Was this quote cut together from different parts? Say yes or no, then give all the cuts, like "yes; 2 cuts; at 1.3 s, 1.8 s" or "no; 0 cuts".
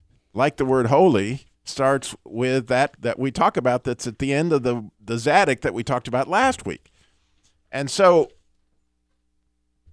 yes; 3 cuts; at 1.6 s, 3.0 s, 4.9 s